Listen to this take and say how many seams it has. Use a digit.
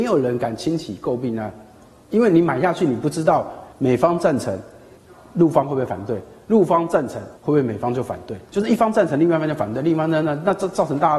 4